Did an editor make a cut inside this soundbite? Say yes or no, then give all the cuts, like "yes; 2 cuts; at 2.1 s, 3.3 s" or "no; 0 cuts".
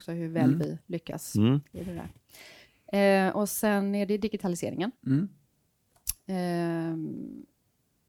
yes; 1 cut; at 5.0 s